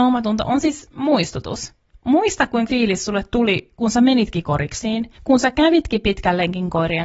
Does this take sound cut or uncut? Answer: cut